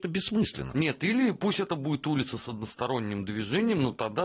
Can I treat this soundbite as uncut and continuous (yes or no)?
yes